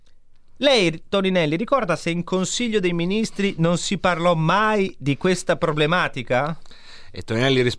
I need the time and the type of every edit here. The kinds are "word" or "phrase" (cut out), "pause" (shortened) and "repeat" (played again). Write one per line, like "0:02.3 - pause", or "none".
none